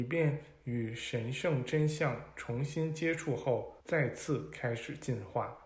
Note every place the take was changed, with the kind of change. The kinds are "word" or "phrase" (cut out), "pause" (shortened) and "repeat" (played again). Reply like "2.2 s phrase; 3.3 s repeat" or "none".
3.8 s pause